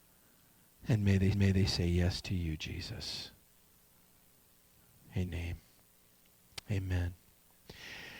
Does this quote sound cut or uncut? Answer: cut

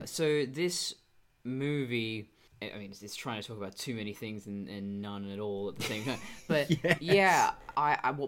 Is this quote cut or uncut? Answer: uncut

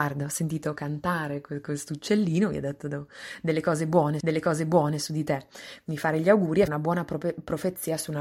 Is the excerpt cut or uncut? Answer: cut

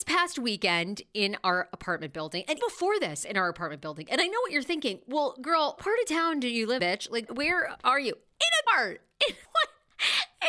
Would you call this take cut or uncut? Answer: cut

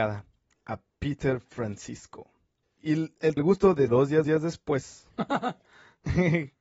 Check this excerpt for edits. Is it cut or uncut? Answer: cut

